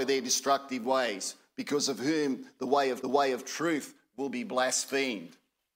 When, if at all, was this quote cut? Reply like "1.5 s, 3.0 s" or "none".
3.0 s